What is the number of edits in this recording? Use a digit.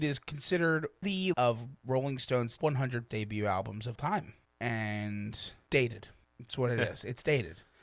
6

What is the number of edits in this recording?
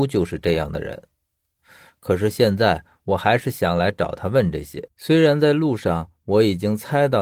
1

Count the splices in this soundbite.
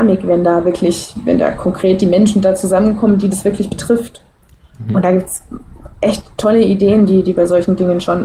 0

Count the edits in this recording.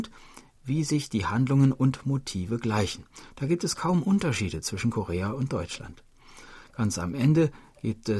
0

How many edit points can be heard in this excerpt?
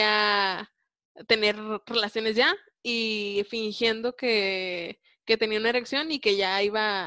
0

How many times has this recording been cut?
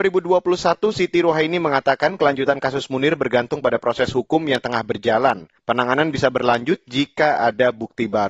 1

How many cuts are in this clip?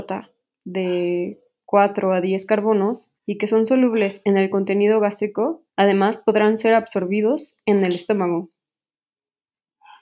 2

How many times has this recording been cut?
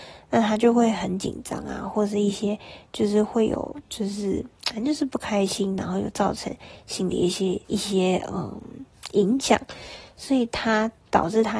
2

